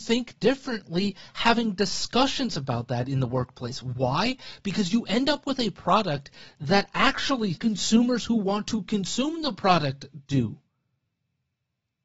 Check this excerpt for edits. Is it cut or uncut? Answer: cut